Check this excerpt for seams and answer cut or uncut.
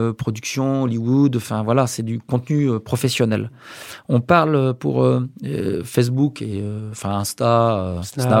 uncut